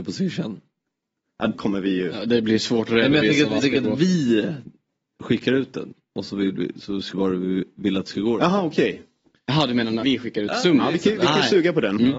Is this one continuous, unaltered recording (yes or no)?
no